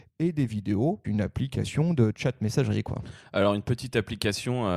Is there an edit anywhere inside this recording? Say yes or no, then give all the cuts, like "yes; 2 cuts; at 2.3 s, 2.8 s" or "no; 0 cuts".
yes; 1 cut; at 1.0 s